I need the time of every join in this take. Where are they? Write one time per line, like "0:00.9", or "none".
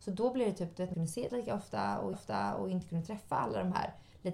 0:00.9
0:01.3
0:02.1